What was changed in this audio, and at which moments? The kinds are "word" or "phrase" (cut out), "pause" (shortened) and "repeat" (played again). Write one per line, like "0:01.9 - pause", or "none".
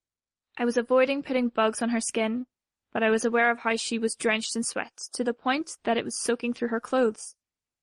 none